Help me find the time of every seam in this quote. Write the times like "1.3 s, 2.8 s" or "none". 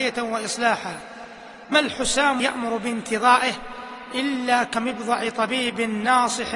1.7 s, 2.4 s